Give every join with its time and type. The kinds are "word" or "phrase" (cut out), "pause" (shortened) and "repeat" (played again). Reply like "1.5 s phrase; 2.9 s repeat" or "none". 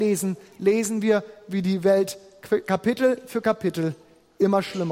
none